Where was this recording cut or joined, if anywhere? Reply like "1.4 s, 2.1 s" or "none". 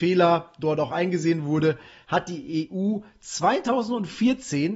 none